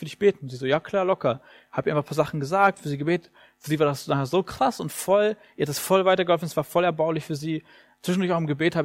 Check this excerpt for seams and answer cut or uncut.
uncut